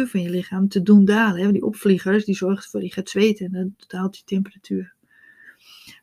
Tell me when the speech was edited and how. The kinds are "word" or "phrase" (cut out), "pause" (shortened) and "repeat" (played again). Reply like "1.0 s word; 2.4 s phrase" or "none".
none